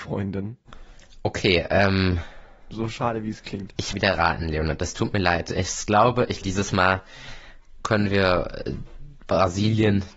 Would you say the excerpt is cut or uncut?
cut